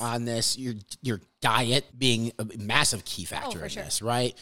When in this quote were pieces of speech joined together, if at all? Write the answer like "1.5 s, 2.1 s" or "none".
1.9 s

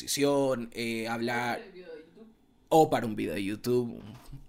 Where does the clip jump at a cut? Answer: none

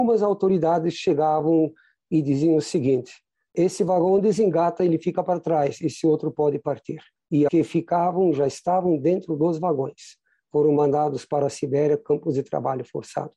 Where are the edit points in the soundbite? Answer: 7.5 s

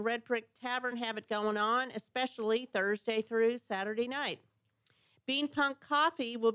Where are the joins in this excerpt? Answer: none

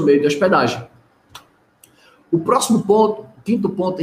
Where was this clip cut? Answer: none

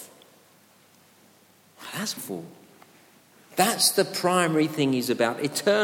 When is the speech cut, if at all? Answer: 2.2 s

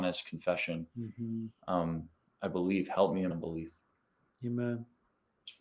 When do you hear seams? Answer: 2.3 s, 3.3 s

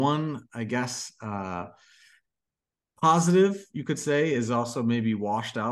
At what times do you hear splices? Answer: none

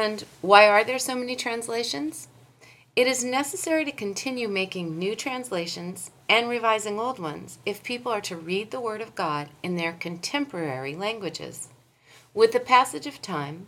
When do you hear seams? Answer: none

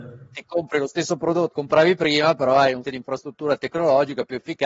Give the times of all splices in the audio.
1.5 s, 2.8 s

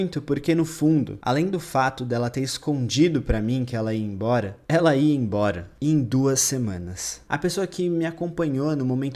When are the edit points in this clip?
none

